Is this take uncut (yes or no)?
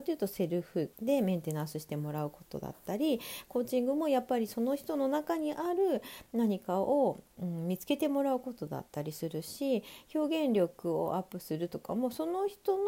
no